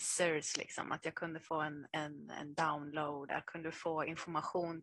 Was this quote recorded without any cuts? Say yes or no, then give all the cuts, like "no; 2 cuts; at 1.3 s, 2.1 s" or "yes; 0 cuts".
no; 1 cut; at 3.3 s